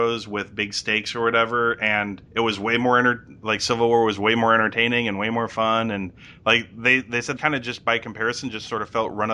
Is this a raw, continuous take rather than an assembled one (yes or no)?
no